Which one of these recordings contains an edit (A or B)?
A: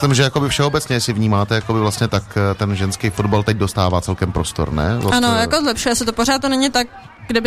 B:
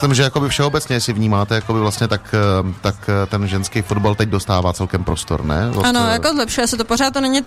A